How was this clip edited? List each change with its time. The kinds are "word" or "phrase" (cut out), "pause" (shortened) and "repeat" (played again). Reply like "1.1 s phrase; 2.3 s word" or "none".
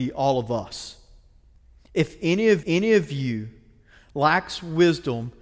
2.6 s repeat